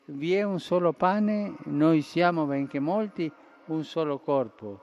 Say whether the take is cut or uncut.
uncut